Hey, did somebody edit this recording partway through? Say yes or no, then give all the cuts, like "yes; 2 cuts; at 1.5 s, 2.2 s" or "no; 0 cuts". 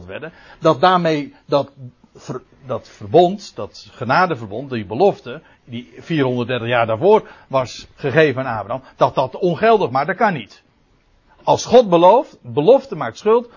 no; 0 cuts